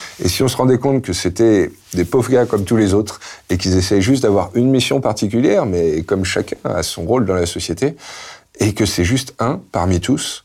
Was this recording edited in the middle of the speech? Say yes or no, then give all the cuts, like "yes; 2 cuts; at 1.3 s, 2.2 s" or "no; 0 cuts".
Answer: no; 0 cuts